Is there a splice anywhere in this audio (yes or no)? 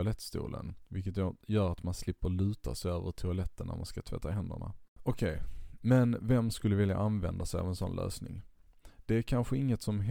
yes